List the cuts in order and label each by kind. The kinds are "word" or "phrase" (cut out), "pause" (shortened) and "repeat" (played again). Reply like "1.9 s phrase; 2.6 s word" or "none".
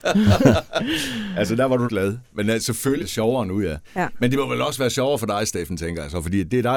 1.9 s phrase; 3.0 s word; 3.8 s pause